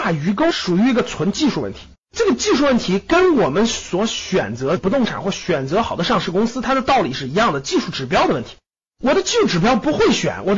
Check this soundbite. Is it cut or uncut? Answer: cut